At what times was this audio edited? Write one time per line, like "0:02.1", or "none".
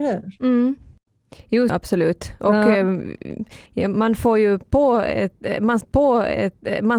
0:01.7
0:03.7
0:05.8